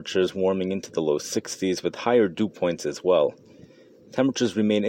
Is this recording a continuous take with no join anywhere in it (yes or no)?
yes